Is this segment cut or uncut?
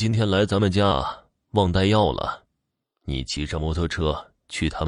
uncut